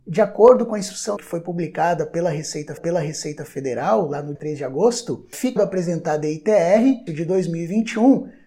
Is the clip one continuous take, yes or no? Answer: no